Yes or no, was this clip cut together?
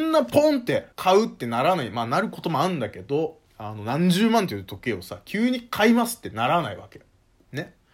yes